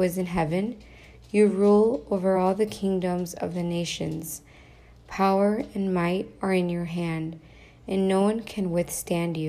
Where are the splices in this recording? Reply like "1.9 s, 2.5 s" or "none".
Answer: none